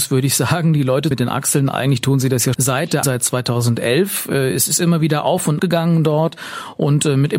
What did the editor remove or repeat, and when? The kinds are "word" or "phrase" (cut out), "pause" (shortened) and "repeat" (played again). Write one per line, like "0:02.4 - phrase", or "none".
0:01.1 - word
0:02.5 - word
0:03.0 - word
0:05.6 - word